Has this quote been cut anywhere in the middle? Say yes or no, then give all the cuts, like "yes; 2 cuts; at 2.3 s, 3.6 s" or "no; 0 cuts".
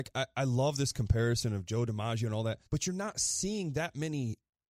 yes; 1 cut; at 2.7 s